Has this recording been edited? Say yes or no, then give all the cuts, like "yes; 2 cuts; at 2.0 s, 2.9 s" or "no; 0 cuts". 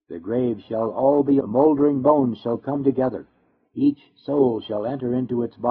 yes; 1 cut; at 1.4 s